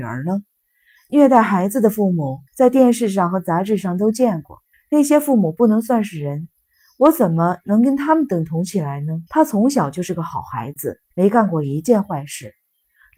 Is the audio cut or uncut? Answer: cut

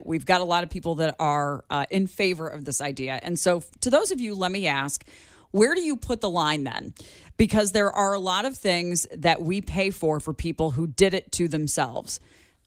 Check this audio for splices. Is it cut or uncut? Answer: uncut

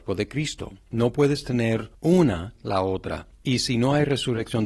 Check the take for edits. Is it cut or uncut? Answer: cut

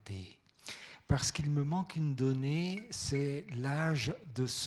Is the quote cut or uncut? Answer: uncut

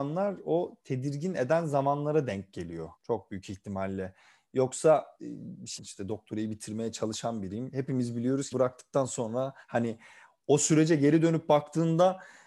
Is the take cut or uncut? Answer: cut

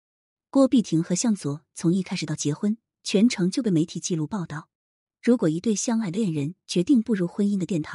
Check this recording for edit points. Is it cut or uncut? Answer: uncut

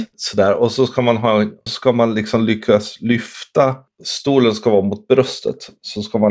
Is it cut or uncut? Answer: cut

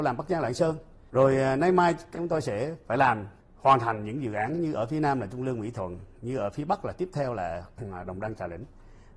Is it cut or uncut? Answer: cut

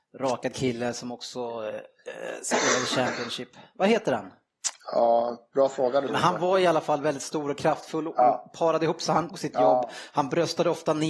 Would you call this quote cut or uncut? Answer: cut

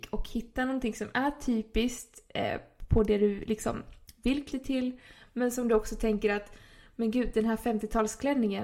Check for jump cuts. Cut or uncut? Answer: cut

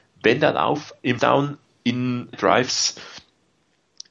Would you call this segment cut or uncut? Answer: cut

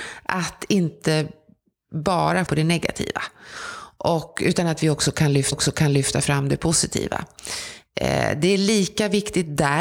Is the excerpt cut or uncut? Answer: cut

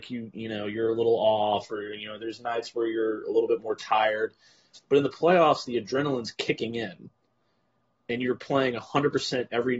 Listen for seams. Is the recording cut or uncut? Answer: uncut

